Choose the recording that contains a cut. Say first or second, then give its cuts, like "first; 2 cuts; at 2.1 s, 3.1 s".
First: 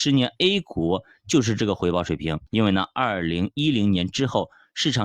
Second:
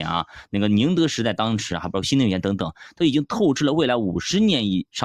first; 1 cut; at 2.5 s